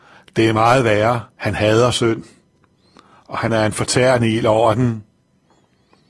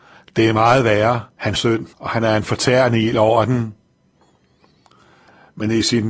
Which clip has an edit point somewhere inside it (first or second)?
second